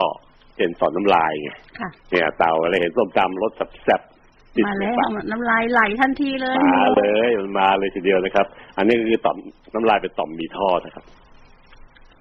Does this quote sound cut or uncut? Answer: cut